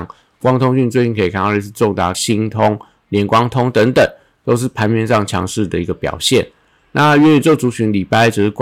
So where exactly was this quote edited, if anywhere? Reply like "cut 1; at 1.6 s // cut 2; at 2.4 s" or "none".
cut 1; at 2.1 s